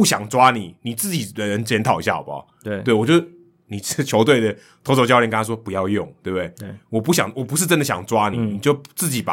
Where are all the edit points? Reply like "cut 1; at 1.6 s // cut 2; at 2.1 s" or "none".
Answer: none